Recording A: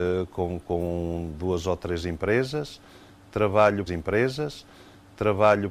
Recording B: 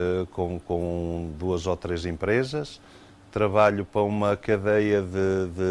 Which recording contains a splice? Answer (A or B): A